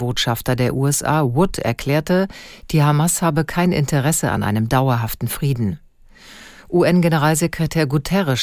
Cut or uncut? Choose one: uncut